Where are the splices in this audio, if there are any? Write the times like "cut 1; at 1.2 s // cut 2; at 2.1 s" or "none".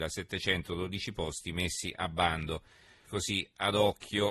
cut 1; at 3.1 s